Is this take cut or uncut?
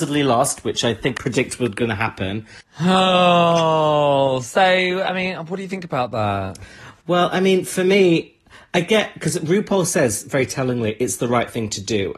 cut